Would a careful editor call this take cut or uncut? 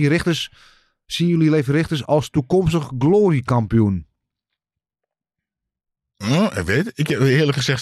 uncut